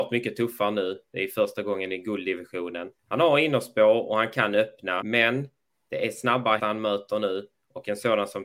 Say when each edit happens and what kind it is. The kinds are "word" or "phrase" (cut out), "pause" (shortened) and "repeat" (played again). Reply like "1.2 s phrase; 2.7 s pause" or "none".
3.0 s pause; 5.0 s word; 6.6 s word

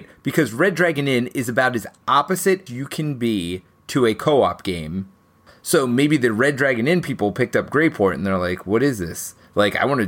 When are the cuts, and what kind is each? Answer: 2.7 s word

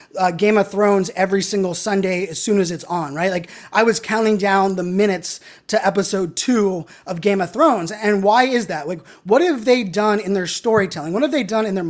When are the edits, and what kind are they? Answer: none

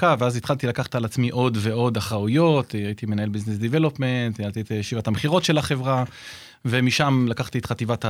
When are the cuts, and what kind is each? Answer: none

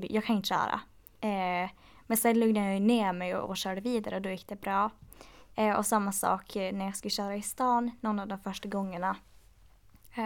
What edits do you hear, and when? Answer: none

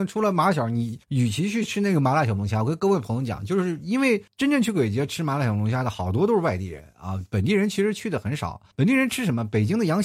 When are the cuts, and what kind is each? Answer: 1.0 s pause; 4.3 s pause; 8.7 s pause

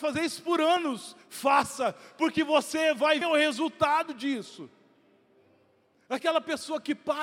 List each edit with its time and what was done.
1.2 s pause; 3.2 s word

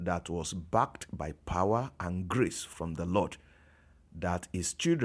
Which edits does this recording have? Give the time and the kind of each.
none

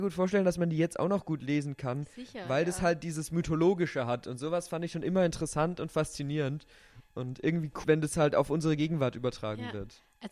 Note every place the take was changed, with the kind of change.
7.8 s word

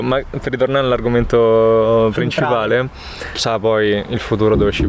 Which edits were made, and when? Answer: 3.4 s word

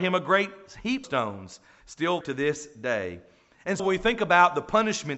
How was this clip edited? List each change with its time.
1.0 s word; 2.2 s word; 3.8 s word

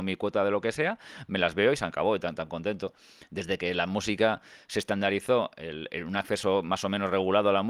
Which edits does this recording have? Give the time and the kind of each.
5.9 s word

